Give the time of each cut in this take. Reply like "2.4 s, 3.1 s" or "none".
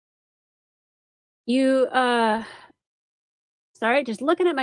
none